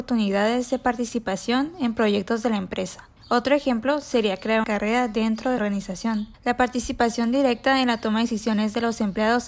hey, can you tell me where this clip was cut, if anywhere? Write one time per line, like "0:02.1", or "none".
0:03.2
0:04.6
0:05.6
0:06.3